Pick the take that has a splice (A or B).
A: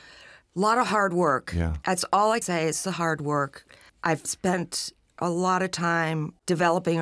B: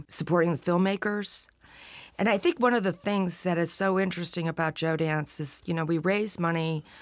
A